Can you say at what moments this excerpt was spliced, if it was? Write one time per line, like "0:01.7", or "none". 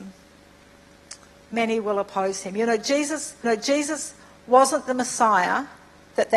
0:01.3
0:03.4